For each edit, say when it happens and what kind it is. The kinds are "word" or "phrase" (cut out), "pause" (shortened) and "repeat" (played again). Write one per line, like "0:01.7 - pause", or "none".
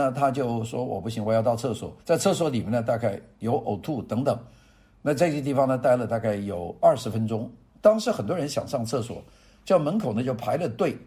0:02.0 - pause